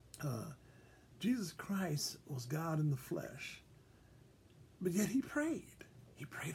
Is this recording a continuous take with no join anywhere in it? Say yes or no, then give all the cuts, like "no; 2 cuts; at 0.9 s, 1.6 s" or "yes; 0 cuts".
no; 1 cut; at 4.7 s